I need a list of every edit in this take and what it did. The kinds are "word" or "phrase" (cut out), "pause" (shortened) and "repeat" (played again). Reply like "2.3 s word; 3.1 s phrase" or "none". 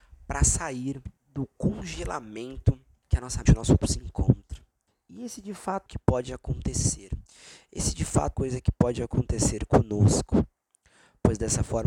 1.2 s pause; 3.0 s pause; 3.5 s word; 3.8 s word; 4.9 s pause; 5.9 s phrase; 8.3 s phrase